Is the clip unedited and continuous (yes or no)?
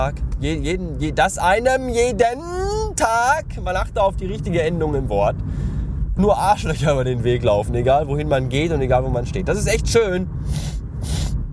no